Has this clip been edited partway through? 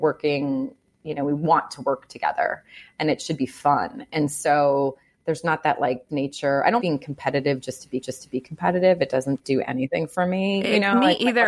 yes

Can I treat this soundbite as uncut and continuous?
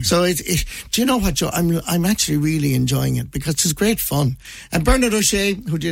yes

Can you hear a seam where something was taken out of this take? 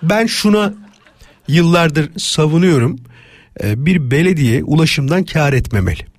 no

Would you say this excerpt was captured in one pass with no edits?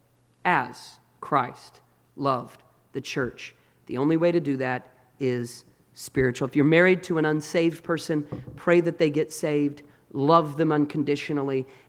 yes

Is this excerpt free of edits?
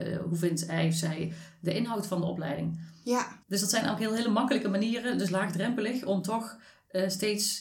no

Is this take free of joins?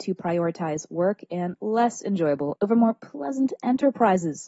no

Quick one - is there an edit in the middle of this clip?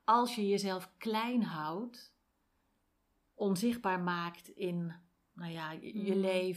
no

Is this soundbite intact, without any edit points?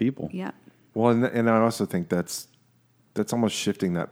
yes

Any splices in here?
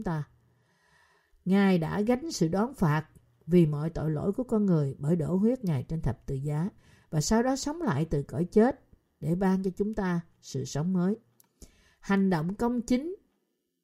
no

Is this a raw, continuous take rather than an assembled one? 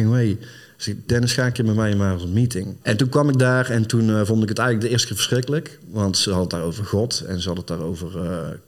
no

